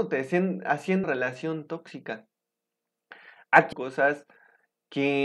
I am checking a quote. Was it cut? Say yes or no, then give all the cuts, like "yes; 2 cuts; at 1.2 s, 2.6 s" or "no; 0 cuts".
yes; 2 cuts; at 1.0 s, 3.7 s